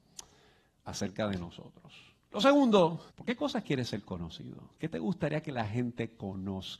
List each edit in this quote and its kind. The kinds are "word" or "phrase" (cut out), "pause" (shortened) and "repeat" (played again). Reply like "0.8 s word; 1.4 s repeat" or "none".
3.1 s pause